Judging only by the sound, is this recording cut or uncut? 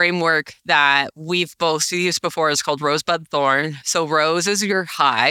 uncut